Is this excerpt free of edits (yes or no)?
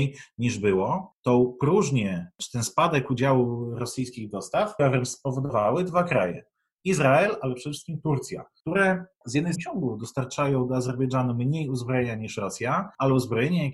no